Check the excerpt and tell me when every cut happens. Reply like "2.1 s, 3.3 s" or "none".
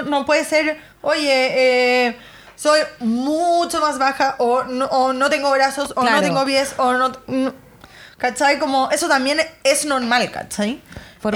none